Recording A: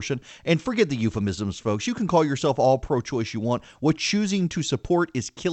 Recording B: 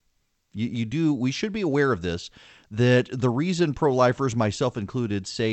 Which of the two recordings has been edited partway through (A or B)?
A